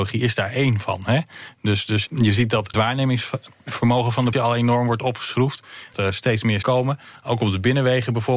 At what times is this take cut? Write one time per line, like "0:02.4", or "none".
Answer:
0:02.1
0:02.7
0:04.3
0:05.9
0:06.6